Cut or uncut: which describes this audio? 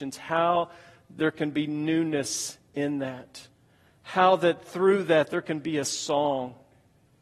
uncut